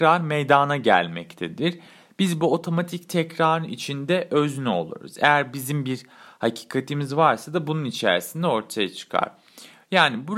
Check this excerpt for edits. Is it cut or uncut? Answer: uncut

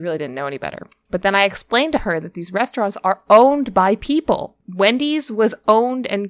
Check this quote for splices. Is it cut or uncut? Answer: uncut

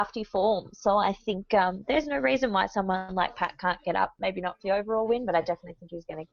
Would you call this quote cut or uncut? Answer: uncut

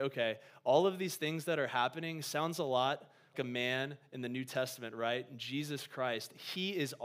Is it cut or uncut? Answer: cut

